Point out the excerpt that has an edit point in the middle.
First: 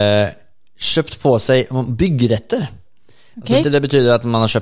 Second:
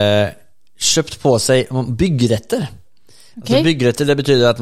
first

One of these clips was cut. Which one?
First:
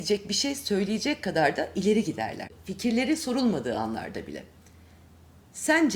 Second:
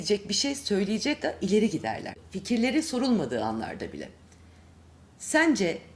second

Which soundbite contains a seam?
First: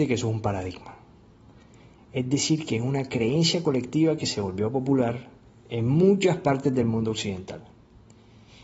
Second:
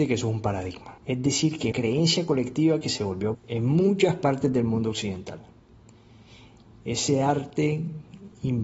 second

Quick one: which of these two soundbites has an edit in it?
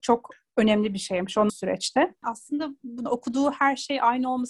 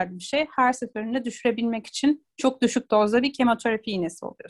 first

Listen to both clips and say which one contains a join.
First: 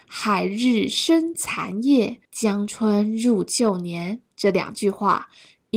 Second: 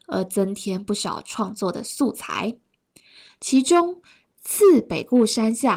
first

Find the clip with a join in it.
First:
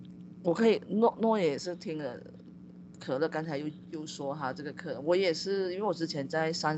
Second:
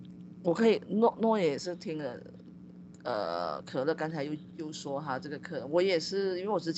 first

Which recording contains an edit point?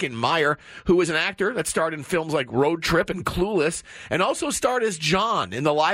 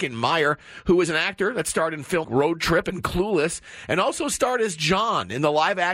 second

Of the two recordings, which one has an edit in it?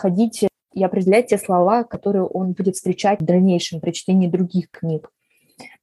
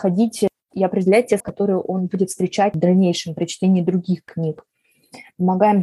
second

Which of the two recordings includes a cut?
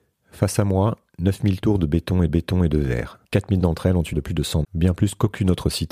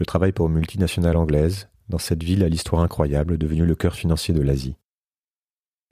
first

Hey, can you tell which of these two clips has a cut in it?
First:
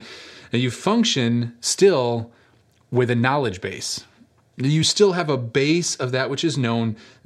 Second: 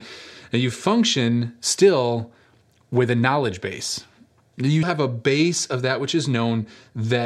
second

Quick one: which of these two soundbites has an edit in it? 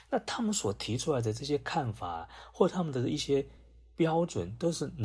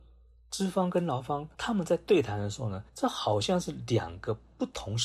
second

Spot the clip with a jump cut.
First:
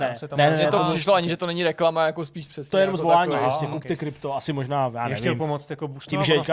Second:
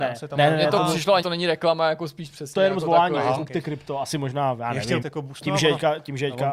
second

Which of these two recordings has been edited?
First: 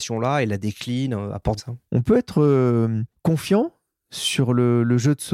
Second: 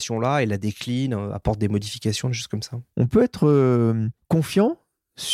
first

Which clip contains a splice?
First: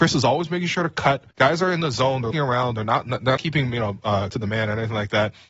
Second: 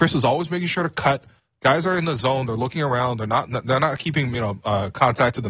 first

